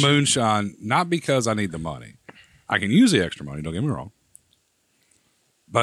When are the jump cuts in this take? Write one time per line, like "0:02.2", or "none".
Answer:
none